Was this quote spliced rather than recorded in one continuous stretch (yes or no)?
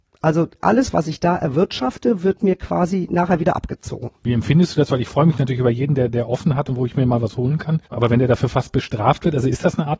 yes